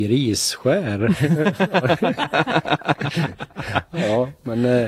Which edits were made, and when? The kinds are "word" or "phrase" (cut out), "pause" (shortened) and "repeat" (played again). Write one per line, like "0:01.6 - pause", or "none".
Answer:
none